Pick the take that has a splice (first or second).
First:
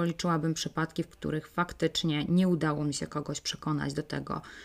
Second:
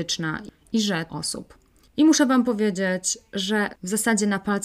second